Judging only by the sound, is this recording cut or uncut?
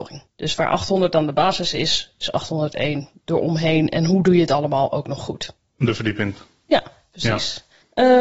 uncut